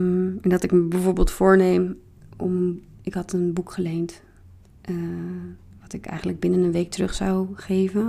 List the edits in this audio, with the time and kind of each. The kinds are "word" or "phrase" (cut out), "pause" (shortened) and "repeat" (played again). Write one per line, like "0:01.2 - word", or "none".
none

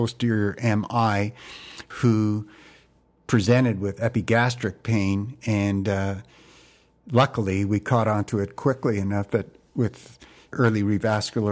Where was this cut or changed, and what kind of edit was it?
none

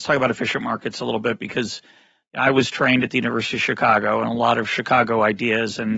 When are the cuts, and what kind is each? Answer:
none

